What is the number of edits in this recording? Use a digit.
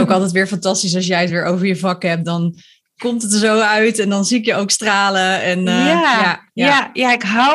0